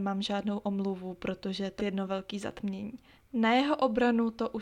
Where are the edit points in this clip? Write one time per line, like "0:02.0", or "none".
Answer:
0:01.8
0:03.2